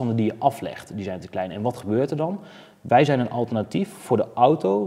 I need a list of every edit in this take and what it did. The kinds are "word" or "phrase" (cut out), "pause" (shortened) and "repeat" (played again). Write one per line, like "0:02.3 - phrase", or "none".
none